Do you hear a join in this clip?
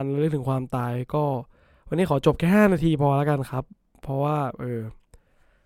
no; 0 cuts

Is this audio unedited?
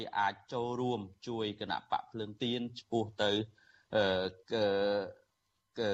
no; 1 cut; at 4.4 s

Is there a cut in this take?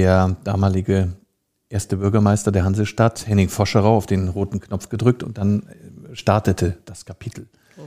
no; 0 cuts

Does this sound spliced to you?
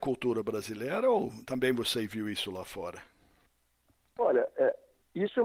no; 0 cuts

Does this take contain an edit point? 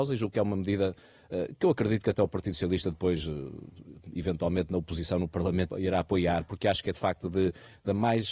yes; 1 cut; at 5.7 s

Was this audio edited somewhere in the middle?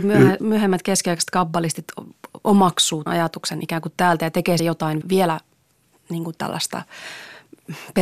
yes; 3 cuts; at 3.1 s, 4.6 s, 5.0 s

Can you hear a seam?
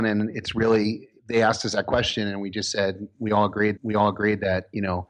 yes; 2 cuts; at 1.2 s, 3.8 s

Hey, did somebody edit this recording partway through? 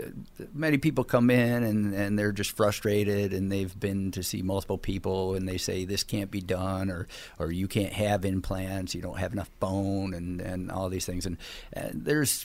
no; 0 cuts

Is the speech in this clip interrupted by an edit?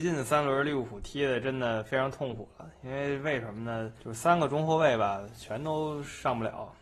no; 0 cuts

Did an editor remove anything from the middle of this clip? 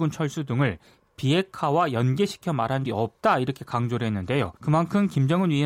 yes; 2 cuts; at 2.9 s, 4.6 s

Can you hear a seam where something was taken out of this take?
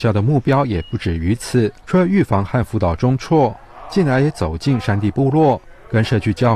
yes; 1 cut; at 1.8 s

